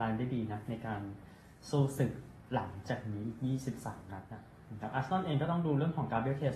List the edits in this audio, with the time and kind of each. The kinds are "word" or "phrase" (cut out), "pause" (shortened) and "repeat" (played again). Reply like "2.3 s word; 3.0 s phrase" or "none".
none